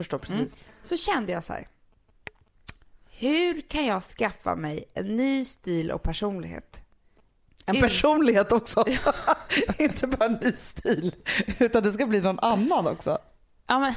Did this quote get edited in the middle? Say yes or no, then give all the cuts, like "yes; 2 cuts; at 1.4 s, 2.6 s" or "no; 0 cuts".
no; 0 cuts